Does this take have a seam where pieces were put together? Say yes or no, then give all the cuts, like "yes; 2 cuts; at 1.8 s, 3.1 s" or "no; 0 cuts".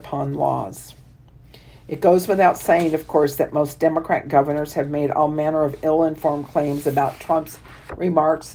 no; 0 cuts